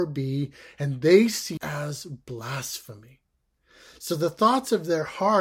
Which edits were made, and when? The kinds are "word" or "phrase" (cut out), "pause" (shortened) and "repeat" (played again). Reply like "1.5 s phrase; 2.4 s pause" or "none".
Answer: 1.6 s word